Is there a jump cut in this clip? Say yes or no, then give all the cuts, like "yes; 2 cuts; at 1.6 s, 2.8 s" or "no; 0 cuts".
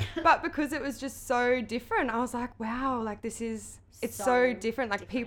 no; 0 cuts